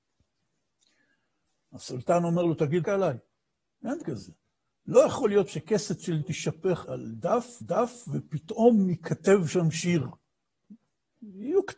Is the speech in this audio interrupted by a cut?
yes; 6 cuts; at 2.8 s, 4.0 s, 5.5 s, 6.2 s, 6.8 s, 7.6 s

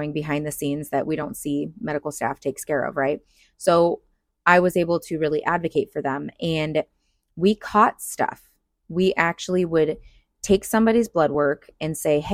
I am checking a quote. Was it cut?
no; 0 cuts

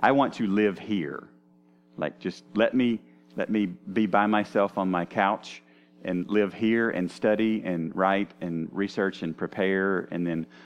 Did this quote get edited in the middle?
no; 0 cuts

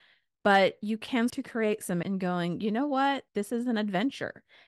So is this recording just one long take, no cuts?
no; 3 cuts; at 1.3 s, 2.0 s, 3.3 s

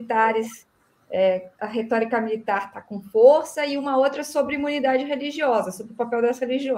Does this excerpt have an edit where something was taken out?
no; 0 cuts

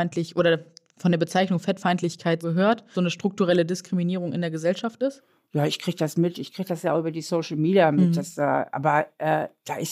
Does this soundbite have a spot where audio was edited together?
yes; 2 cuts; at 2.4 s, 2.9 s

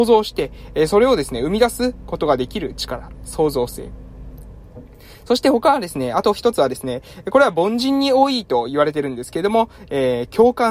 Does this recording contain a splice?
no; 0 cuts

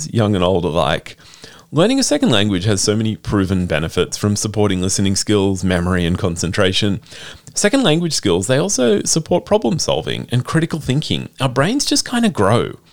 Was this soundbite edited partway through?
no; 0 cuts

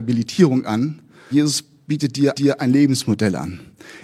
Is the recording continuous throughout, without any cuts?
no; 2 cuts; at 1.3 s, 2.3 s

